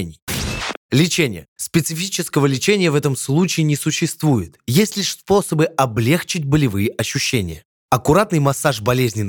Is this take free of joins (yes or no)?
yes